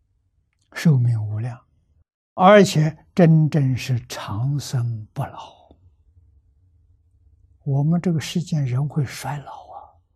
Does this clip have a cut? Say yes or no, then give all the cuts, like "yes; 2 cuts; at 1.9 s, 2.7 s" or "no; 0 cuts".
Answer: no; 0 cuts